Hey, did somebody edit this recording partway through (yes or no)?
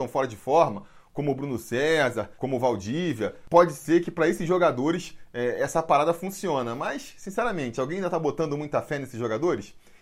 yes